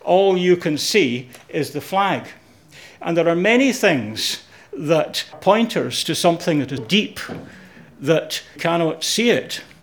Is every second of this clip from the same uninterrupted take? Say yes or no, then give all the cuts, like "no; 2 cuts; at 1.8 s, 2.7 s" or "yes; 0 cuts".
no; 3 cuts; at 5.3 s, 6.8 s, 8.6 s